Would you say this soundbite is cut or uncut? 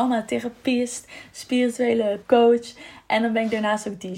cut